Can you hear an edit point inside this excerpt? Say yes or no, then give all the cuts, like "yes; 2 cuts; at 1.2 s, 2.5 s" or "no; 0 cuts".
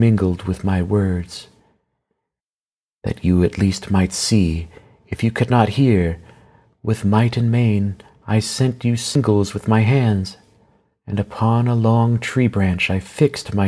no; 0 cuts